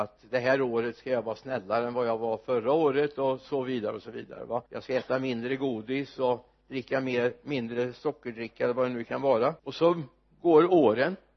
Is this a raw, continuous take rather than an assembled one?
no; 2 cuts; at 4.7 s, 9.6 s

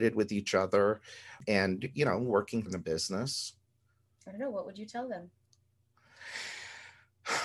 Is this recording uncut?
no; 1 cut; at 2.7 s

